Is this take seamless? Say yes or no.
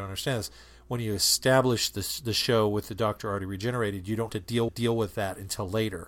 no